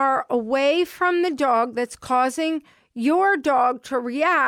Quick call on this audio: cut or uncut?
uncut